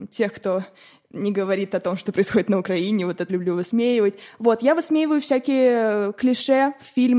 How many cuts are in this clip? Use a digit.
1